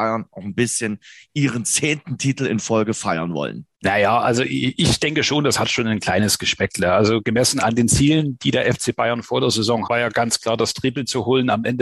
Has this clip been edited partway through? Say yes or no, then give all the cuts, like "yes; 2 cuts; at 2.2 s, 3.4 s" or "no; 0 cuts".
yes; 2 cuts; at 3.7 s, 9.8 s